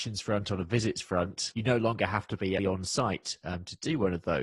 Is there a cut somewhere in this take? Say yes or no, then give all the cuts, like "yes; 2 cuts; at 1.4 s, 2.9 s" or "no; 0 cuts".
yes; 1 cut; at 2.6 s